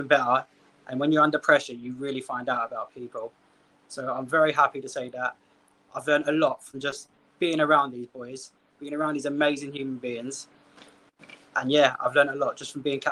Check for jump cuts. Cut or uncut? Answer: uncut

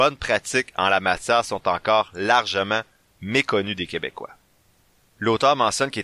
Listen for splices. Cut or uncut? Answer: uncut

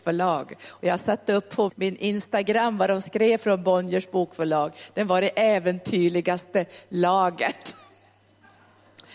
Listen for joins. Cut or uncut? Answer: cut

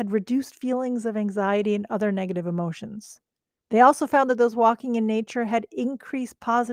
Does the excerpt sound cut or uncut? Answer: uncut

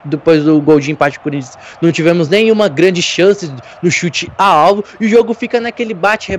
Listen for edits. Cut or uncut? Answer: uncut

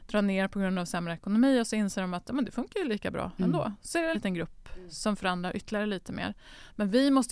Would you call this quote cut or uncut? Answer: cut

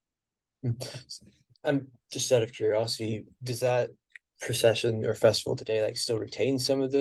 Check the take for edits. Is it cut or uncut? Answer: uncut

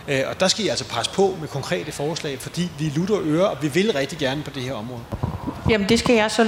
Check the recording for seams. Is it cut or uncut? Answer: uncut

